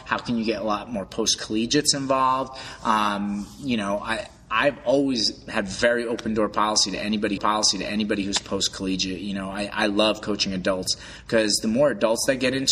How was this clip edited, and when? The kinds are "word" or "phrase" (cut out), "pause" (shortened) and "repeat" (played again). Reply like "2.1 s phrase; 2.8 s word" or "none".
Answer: 7.4 s repeat